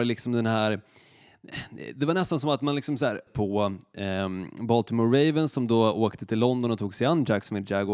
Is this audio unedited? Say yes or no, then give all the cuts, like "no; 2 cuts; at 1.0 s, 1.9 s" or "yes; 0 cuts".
no; 1 cut; at 3.3 s